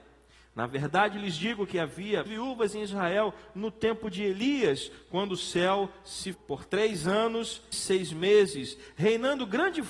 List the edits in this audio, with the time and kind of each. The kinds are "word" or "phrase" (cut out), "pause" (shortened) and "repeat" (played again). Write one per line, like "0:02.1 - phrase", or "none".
0:02.3 - word
0:06.3 - word
0:07.7 - word